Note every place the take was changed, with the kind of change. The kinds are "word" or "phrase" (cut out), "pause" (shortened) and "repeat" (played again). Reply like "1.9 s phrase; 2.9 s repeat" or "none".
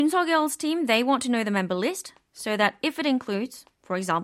none